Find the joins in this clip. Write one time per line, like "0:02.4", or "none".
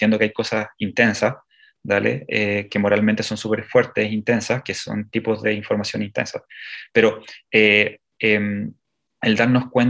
none